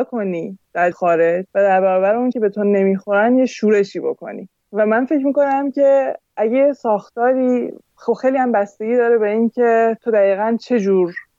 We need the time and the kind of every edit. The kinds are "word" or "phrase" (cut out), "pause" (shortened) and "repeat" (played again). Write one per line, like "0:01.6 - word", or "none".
0:00.9 - word
0:01.5 - pause
0:02.3 - word